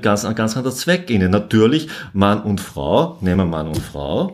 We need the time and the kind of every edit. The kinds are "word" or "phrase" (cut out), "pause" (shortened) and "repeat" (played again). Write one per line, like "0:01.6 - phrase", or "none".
none